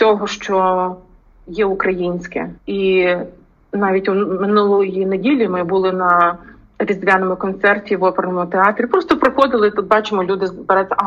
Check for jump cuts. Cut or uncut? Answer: cut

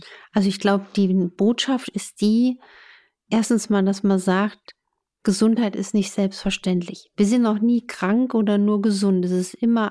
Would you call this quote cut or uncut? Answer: uncut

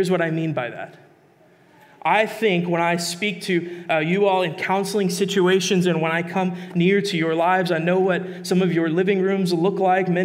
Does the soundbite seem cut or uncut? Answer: uncut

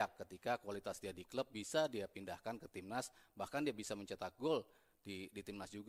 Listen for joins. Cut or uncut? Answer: uncut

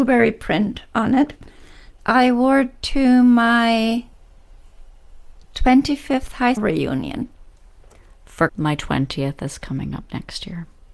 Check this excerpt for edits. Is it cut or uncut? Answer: cut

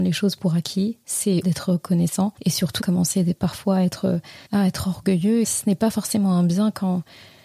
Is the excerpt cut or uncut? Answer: cut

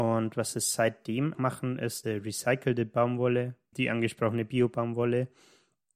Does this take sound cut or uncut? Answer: cut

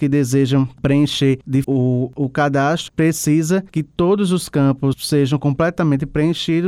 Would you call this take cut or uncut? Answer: cut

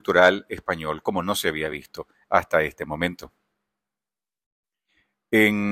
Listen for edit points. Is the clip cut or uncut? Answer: uncut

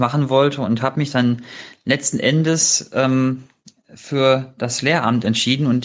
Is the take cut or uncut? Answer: uncut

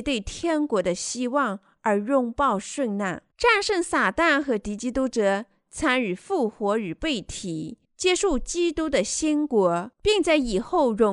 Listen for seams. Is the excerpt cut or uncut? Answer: cut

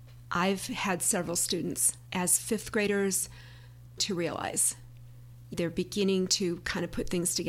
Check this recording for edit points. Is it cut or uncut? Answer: cut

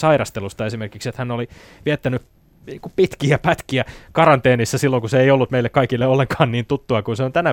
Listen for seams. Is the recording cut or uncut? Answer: uncut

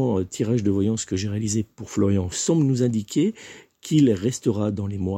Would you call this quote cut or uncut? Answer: cut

